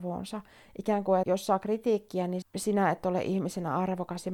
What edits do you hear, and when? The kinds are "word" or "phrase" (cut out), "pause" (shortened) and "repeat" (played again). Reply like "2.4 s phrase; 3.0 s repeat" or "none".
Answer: 1.2 s word; 2.4 s phrase